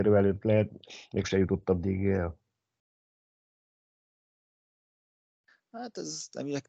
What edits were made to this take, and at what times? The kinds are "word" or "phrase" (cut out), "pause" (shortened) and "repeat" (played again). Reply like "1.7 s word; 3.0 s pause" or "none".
1.2 s word